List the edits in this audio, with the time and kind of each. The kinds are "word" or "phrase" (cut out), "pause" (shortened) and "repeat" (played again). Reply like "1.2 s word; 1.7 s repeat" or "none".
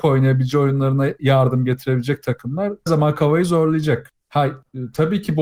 1.2 s word; 2.9 s word; 4.2 s pause

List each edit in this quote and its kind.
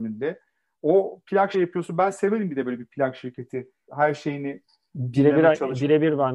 1.5 s phrase; 3.9 s word

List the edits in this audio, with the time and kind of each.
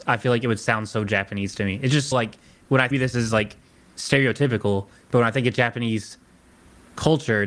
2.1 s word; 2.9 s phrase

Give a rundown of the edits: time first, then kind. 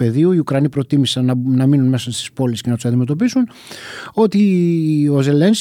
none

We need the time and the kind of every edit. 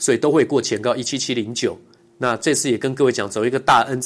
2.0 s pause

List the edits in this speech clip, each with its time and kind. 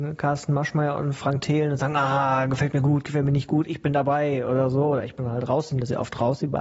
none

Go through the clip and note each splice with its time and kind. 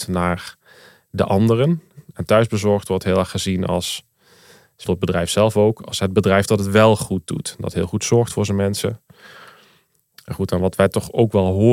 4.8 s word

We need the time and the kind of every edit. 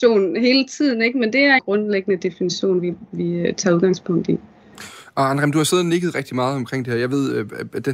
1.6 s phrase

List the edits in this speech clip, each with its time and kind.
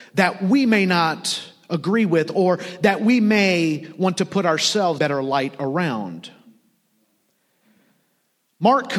5.0 s word

